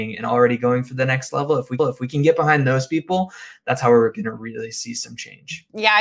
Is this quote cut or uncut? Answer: cut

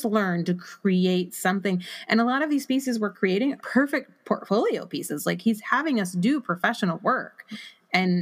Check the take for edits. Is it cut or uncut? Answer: cut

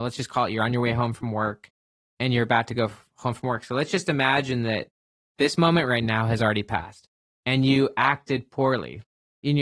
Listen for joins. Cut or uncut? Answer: uncut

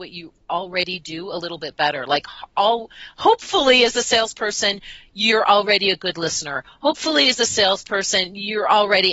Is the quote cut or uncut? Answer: uncut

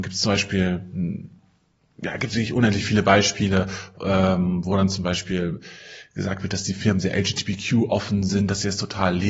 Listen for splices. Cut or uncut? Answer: uncut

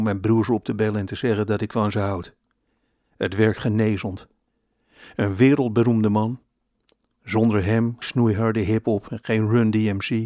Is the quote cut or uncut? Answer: cut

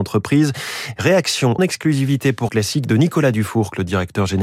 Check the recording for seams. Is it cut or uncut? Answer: cut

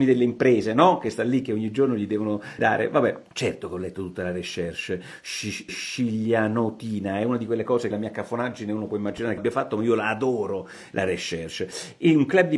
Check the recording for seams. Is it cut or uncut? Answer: cut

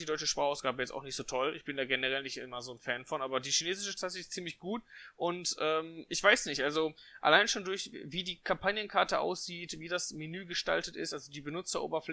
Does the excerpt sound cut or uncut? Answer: uncut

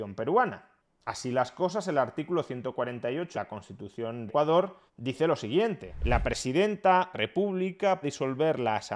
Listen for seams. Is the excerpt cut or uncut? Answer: cut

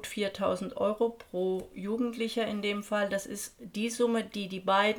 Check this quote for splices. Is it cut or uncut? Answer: uncut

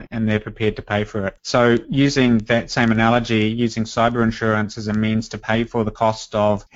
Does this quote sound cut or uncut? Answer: uncut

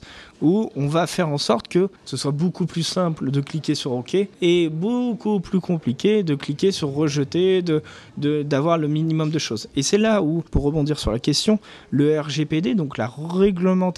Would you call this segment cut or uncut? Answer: cut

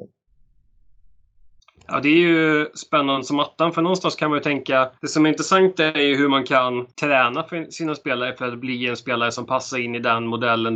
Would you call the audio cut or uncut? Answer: cut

